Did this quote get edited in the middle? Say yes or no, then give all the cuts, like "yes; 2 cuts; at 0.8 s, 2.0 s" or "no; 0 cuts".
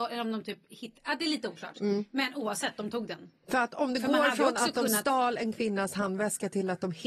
no; 0 cuts